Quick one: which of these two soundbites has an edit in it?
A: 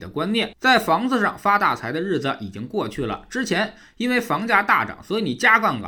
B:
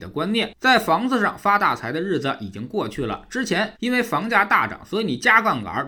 B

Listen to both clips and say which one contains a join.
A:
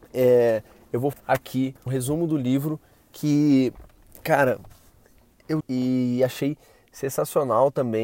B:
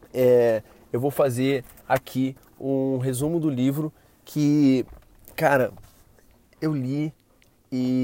A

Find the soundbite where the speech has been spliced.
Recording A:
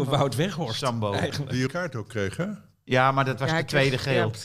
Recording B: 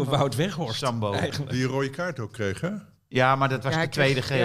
A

